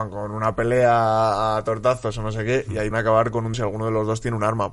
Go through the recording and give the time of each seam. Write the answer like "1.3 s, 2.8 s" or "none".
2.9 s, 3.5 s